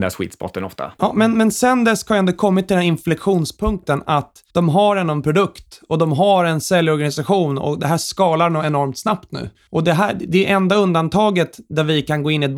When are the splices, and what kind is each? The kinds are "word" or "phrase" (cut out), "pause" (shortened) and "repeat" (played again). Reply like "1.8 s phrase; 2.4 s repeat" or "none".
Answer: 4.5 s pause